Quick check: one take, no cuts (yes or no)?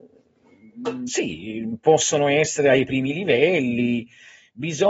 yes